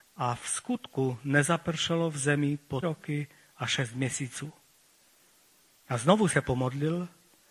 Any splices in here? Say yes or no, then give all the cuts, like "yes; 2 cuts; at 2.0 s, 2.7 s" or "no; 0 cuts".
yes; 1 cut; at 2.8 s